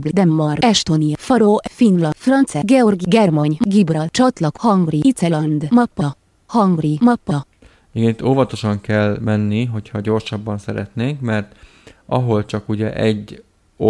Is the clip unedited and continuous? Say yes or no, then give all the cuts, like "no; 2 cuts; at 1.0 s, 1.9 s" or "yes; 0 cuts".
yes; 0 cuts